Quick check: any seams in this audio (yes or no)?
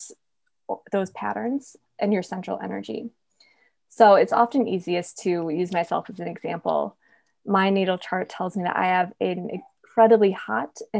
no